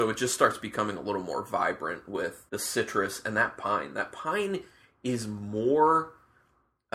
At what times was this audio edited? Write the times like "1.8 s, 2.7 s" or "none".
2.5 s